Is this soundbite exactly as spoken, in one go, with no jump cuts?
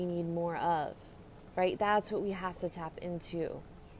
yes; 0 cuts

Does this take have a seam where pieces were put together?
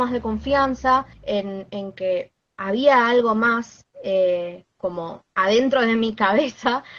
yes; 3 cuts; at 1.1 s, 2.4 s, 5.3 s

